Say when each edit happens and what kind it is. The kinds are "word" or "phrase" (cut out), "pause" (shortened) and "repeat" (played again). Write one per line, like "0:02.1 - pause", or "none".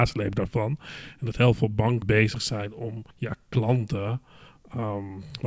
0:02.0 - word
0:03.1 - pause